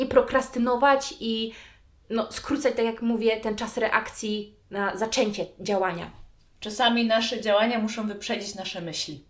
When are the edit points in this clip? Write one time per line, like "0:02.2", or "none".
none